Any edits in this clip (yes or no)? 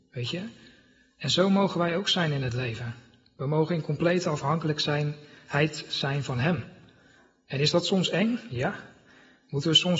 no